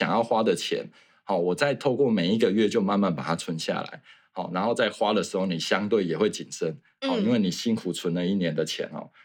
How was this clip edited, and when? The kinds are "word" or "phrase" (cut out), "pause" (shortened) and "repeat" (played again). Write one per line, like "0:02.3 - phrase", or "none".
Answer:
none